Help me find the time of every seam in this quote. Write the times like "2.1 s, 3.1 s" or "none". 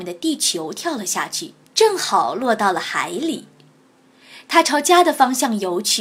1.6 s